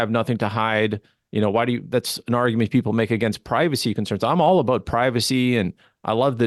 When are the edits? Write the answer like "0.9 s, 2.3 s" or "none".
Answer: none